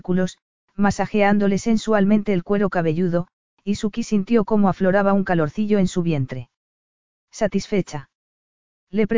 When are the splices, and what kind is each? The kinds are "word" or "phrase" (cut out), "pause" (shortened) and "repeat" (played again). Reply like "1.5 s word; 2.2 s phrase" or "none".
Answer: none

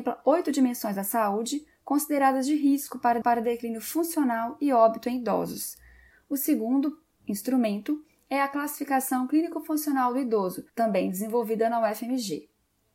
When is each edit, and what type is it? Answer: 3.2 s repeat; 6.1 s pause; 10.7 s pause

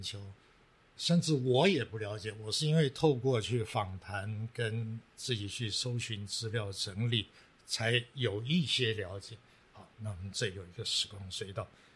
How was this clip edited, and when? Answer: 1.0 s word; 9.9 s pause

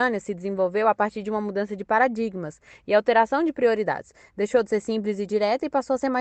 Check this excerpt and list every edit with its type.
none

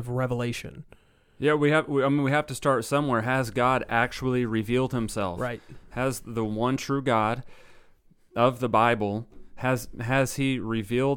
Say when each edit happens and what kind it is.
none

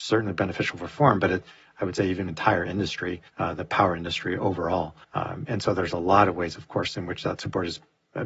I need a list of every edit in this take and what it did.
2.3 s phrase; 3.3 s pause; 5.0 s pause

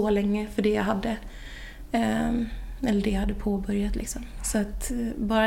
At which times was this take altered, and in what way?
none

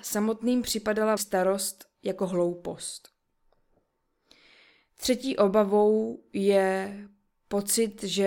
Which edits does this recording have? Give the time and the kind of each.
1.2 s word

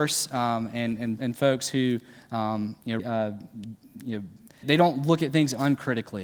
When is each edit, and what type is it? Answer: 1.2 s word; 3.0 s word; 4.6 s word

